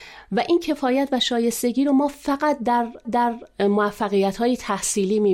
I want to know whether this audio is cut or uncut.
cut